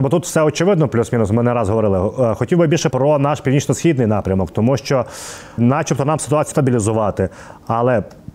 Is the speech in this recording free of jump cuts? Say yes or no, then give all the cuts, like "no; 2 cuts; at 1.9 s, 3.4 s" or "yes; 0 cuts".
no; 3 cuts; at 2.9 s, 5.6 s, 6.5 s